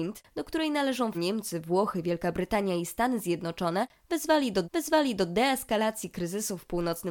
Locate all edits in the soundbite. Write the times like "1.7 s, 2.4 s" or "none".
1.1 s, 4.6 s

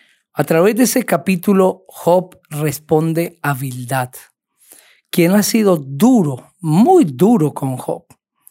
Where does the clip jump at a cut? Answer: none

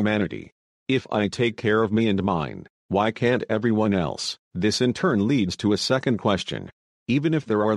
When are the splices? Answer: 4.4 s

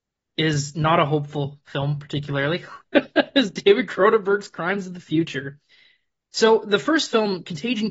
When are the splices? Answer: none

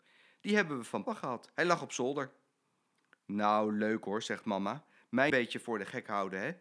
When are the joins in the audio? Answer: 1.1 s, 5.3 s

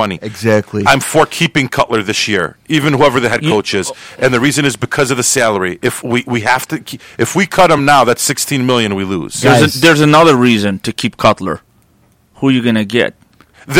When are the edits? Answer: none

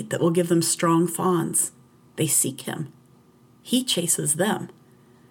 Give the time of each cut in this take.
none

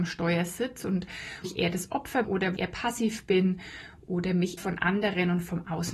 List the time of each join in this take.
1.4 s, 2.2 s, 2.6 s, 4.6 s

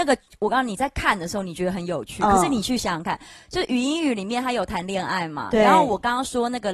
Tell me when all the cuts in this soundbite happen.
none

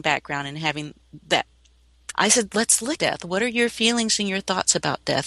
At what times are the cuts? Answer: 2.1 s, 3.0 s

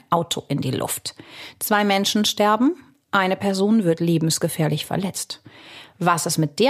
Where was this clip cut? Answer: none

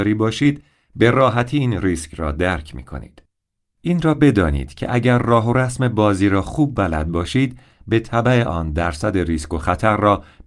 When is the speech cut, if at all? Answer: none

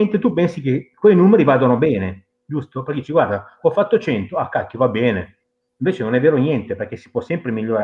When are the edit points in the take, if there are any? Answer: 2.3 s, 5.7 s

